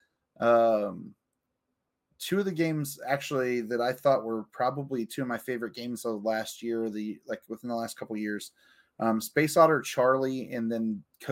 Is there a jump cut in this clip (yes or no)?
no